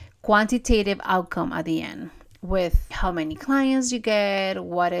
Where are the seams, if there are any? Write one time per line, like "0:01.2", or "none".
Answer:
0:02.9